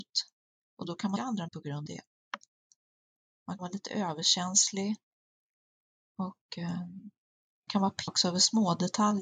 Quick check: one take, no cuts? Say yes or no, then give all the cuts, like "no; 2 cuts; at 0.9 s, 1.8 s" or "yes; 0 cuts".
no; 6 cuts; at 1.2 s, 1.5 s, 1.9 s, 3.6 s, 7.7 s, 8.1 s